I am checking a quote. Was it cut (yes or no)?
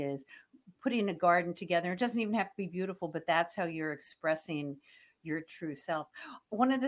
no